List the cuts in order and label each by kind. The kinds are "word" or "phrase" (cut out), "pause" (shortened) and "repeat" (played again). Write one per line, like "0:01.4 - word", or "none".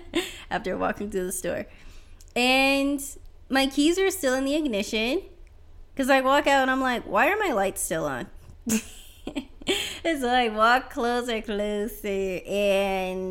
0:11.4 - word